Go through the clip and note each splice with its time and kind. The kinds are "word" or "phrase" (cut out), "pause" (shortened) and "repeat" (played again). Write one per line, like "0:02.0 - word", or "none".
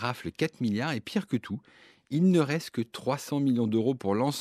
none